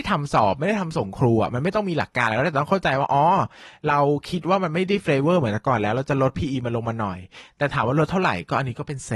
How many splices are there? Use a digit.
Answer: 0